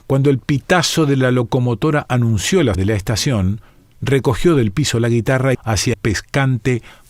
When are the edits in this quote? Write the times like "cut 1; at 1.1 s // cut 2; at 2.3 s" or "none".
cut 1; at 2.7 s // cut 2; at 3.7 s // cut 3; at 5.5 s // cut 4; at 5.9 s